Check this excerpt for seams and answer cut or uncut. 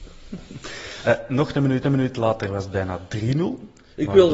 cut